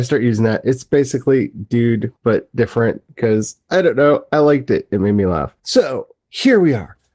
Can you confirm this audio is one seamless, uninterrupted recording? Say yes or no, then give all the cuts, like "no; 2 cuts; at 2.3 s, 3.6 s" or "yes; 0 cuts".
no; 2 cuts; at 2.2 s, 5.6 s